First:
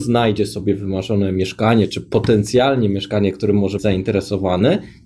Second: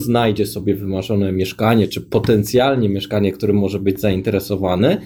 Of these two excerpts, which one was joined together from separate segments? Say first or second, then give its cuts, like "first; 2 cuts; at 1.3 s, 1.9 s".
first; 1 cut; at 3.8 s